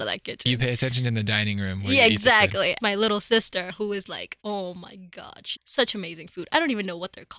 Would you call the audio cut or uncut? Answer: cut